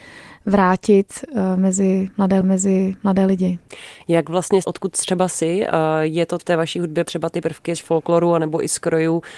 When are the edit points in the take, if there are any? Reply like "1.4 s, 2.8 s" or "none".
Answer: 2.4 s, 4.6 s, 6.4 s, 7.0 s